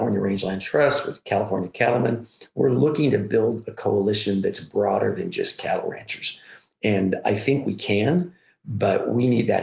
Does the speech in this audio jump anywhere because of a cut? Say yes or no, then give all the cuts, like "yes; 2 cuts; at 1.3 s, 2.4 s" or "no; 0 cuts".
no; 0 cuts